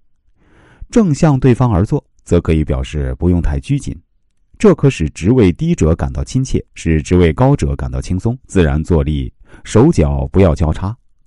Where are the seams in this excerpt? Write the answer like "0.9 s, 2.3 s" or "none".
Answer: 2.1 s, 6.7 s, 8.4 s